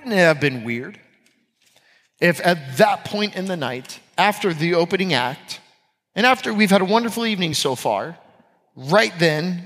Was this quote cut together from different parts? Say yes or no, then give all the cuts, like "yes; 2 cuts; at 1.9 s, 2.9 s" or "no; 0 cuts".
no; 0 cuts